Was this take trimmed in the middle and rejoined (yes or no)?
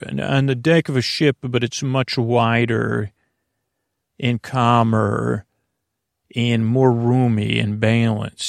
no